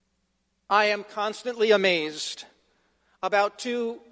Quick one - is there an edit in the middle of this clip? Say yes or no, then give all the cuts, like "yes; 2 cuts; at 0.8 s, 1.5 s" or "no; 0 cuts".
no; 0 cuts